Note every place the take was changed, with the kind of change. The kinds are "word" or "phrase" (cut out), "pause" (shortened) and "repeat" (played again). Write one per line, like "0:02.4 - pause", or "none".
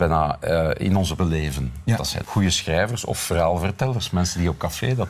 0:01.2 - word
0:02.2 - word